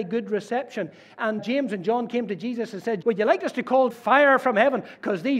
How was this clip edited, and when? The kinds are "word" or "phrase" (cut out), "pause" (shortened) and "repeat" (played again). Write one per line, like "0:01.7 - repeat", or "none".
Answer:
0:01.4 - word
0:03.0 - word
0:03.9 - word